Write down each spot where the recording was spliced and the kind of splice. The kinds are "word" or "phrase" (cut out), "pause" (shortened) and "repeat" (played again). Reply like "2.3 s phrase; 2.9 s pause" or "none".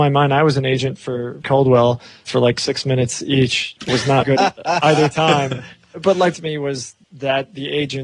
1.4 s phrase; 4.2 s word; 6.3 s phrase; 7.0 s pause